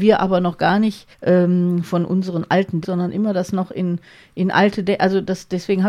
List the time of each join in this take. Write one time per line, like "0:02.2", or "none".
0:01.1
0:02.8